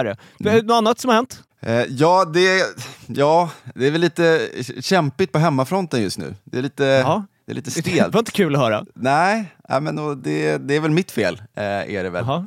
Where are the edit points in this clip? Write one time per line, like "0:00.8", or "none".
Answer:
0:01.5